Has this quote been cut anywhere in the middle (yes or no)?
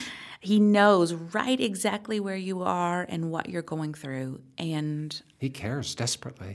no